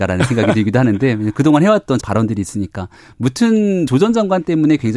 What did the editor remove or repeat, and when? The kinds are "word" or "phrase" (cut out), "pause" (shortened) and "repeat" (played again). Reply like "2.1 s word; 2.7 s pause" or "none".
2.0 s word; 3.9 s word